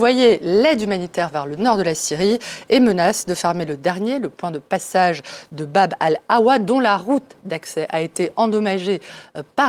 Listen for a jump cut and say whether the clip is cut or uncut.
uncut